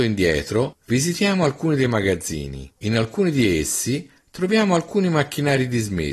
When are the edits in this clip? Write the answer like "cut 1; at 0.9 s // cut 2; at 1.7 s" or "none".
cut 1; at 2.8 s